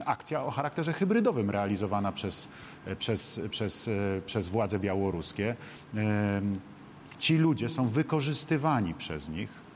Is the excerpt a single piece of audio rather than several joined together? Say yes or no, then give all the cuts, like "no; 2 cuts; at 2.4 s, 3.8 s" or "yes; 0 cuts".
yes; 0 cuts